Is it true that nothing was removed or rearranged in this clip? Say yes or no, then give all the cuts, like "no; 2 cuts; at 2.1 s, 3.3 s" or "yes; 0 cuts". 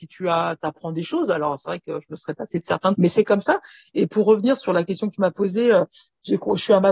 no; 1 cut; at 2.9 s